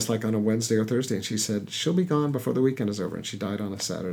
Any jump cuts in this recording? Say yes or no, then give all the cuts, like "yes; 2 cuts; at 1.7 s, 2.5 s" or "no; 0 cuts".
no; 0 cuts